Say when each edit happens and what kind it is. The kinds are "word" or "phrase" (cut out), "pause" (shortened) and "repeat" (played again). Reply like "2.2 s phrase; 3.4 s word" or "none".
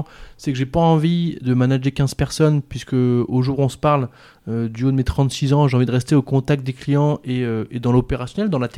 none